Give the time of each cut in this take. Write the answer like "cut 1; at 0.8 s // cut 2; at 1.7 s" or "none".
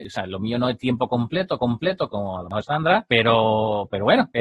cut 1; at 1.6 s // cut 2; at 2.6 s